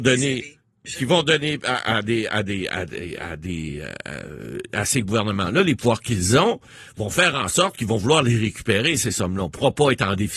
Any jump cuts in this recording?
no; 0 cuts

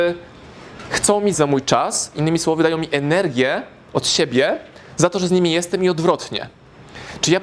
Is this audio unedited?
no; 1 cut; at 1.3 s

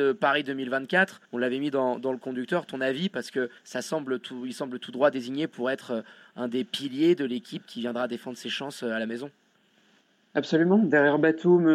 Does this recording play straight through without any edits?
no; 2 cuts; at 1.2 s, 3.6 s

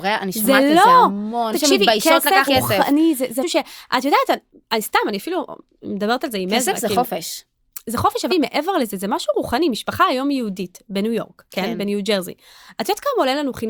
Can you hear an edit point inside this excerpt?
yes; 4 cuts; at 1.5 s, 2.5 s, 3.4 s, 8.3 s

